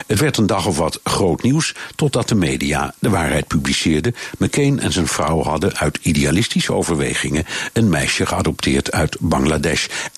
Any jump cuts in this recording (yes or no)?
no